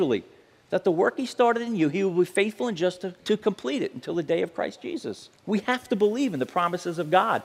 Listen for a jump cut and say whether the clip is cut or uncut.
cut